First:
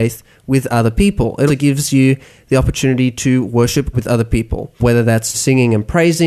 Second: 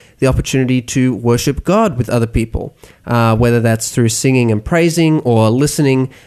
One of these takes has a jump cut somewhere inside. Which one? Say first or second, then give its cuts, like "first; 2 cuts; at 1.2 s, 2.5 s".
first; 4 cuts; at 1.5 s, 3.9 s, 4.8 s, 5.3 s